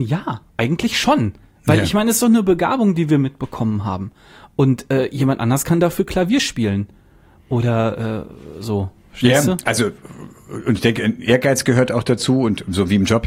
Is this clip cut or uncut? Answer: uncut